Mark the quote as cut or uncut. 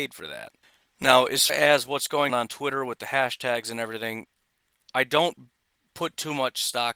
cut